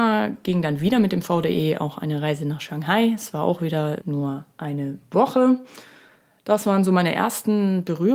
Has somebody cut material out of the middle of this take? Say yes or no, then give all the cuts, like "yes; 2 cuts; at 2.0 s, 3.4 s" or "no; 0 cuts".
yes; 1 cut; at 4.0 s